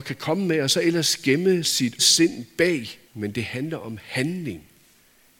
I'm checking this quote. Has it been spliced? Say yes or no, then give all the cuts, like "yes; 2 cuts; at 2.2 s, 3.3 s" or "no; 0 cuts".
yes; 3 cuts; at 1.6 s, 2.0 s, 3.1 s